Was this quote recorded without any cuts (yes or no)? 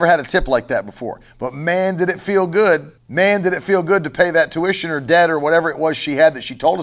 no